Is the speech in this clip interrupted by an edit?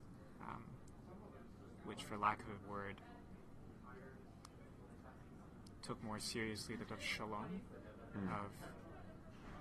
yes; 2 cuts; at 2.6 s, 6.9 s

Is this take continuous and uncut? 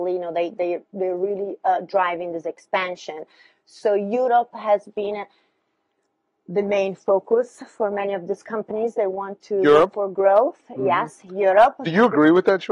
yes; 0 cuts

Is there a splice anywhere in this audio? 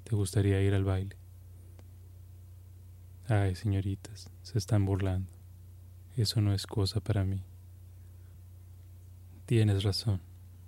no; 0 cuts

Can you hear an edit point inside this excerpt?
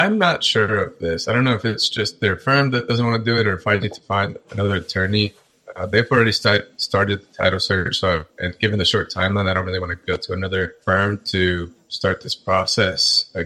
yes; 3 cuts; at 3.8 s, 8.3 s, 10.8 s

